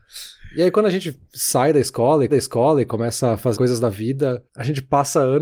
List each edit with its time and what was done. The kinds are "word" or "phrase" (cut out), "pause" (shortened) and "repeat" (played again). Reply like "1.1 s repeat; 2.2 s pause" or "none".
2.3 s repeat; 3.5 s word; 4.5 s pause